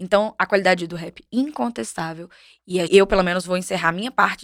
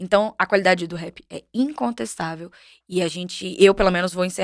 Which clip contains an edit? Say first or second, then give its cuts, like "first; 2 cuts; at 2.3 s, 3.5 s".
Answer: first; 2 cuts; at 1.3 s, 2.9 s